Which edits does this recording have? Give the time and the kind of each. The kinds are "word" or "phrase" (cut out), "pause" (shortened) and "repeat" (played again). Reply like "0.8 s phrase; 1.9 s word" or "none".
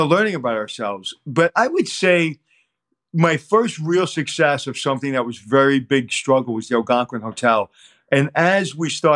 none